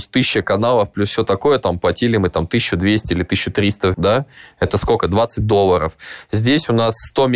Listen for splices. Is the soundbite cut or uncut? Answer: cut